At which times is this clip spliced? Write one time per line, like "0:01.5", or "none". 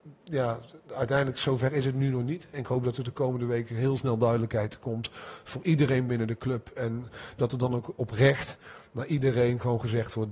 none